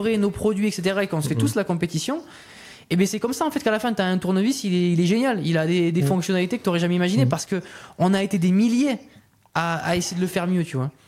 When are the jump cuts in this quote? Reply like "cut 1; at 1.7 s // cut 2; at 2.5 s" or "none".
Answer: none